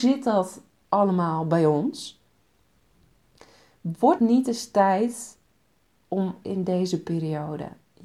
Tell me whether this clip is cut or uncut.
cut